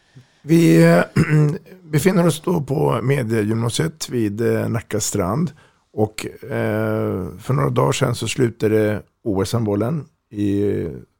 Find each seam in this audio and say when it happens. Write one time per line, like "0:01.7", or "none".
none